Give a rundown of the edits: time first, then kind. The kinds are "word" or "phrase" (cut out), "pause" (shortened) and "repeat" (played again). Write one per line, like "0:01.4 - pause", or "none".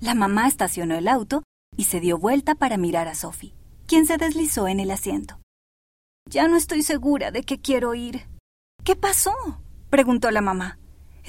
0:08.4 - pause